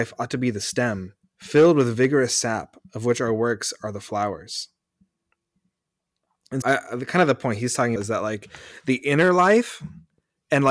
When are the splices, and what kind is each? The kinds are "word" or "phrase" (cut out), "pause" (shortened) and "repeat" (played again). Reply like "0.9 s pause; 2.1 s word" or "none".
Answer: 1.2 s pause; 6.6 s word; 8.0 s word